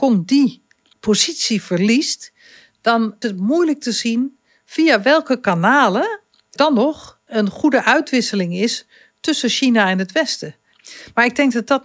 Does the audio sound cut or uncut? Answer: cut